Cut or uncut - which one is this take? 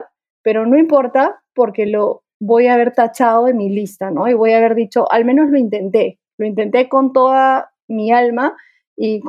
uncut